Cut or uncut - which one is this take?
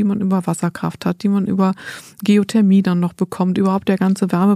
uncut